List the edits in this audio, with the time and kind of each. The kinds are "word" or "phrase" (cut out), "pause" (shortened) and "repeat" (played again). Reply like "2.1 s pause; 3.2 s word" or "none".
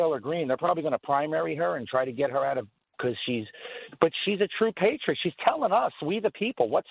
none